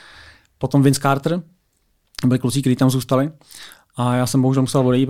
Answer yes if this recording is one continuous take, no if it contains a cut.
yes